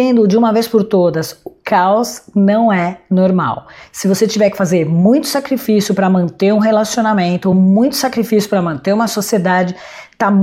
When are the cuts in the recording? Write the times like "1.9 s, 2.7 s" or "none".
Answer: none